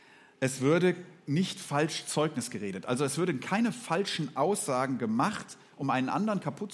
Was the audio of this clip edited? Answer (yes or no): no